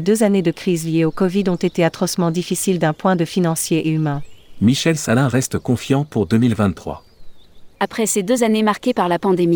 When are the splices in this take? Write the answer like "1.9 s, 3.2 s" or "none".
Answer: 7.7 s